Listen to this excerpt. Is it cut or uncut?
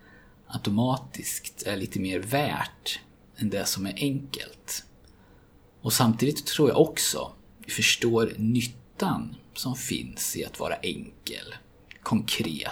cut